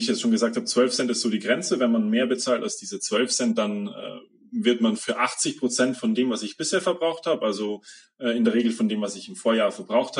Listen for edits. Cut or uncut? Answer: uncut